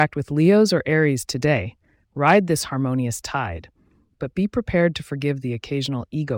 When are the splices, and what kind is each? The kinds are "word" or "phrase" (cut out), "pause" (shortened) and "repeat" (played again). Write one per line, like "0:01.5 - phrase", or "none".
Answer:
none